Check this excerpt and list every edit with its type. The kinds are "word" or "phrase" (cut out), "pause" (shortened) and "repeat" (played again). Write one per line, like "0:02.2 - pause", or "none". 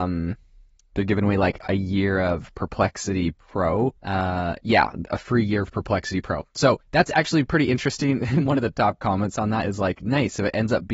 0:04.0 - pause
0:06.8 - pause